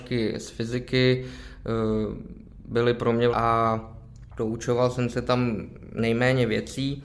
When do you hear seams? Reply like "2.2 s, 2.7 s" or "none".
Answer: 3.3 s